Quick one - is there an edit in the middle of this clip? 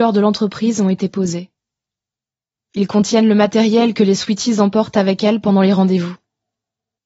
no; 0 cuts

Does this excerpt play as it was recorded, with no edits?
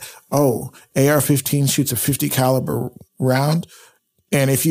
yes; 0 cuts

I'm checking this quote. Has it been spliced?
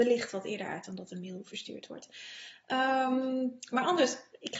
no; 0 cuts

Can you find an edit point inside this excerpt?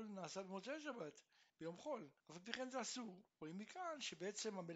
yes; 2 cuts; at 1.5 s, 2.2 s

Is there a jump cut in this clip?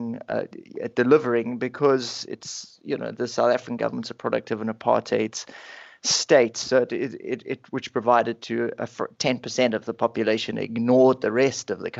no; 0 cuts

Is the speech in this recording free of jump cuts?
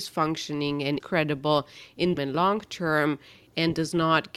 no; 2 cuts; at 1.0 s, 2.2 s

